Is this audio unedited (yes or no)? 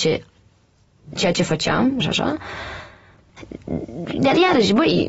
no